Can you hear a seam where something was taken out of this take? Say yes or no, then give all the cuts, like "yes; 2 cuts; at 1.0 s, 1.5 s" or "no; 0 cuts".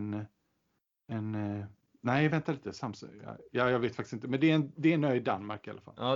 no; 0 cuts